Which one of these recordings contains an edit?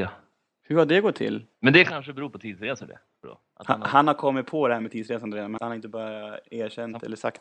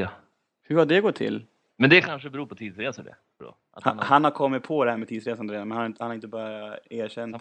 first; 2 cuts; at 1.5 s, 5.6 s

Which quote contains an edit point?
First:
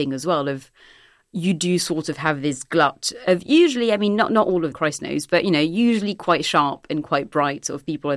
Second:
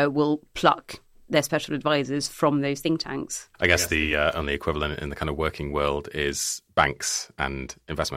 first; 1 cut; at 4.7 s

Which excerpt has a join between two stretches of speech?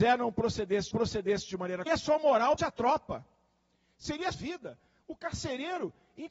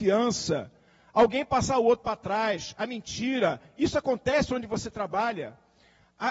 first; 4 cuts; at 0.9 s, 1.9 s, 2.6 s, 4.3 s

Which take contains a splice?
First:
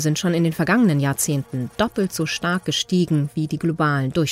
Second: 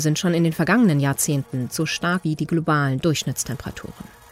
second; 2 cuts; at 1.7 s, 2.2 s

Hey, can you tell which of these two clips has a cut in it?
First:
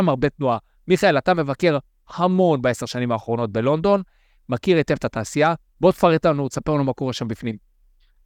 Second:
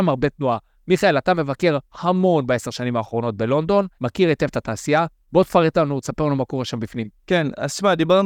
second; 3 cuts; at 1.8 s, 3.9 s, 7.2 s

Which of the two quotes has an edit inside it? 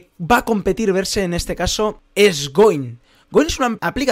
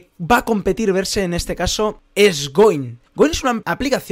second; 1 cut; at 3.1 s

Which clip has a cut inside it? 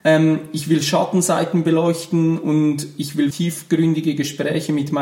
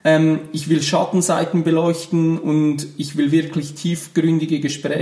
first; 1 cut; at 3.3 s

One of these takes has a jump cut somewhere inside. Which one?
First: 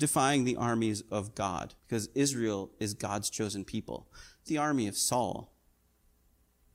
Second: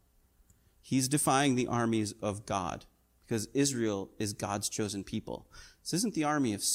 first; 2 cuts; at 1.8 s, 4.5 s

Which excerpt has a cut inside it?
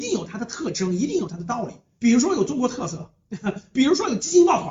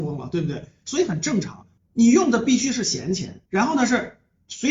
second; 2 cuts; at 1.8 s, 3.5 s

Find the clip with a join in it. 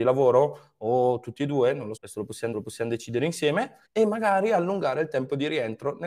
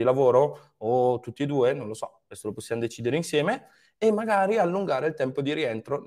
first; 3 cuts; at 2.0 s, 2.5 s, 3.9 s

